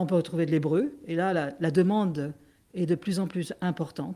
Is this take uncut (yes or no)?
yes